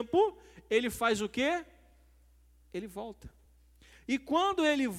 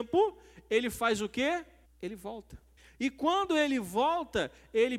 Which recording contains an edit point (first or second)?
second